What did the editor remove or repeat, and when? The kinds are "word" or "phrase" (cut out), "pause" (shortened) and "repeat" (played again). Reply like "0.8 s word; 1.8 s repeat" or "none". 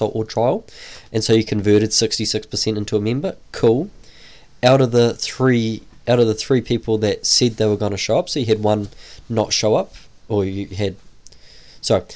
none